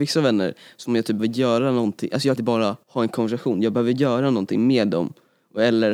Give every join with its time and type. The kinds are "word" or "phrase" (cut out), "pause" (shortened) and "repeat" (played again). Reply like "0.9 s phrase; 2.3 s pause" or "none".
1.2 s word; 2.4 s phrase; 2.8 s pause